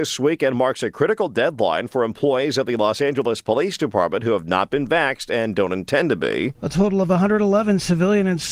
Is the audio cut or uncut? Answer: uncut